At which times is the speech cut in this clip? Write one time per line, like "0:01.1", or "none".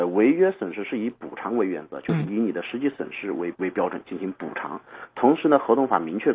0:03.5